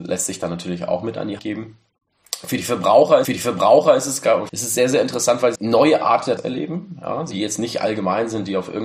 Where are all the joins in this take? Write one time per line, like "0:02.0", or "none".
0:01.4
0:03.2
0:04.5
0:05.5
0:06.4
0:07.3